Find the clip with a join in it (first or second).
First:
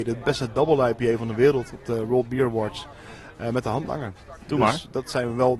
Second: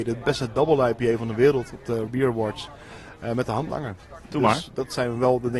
second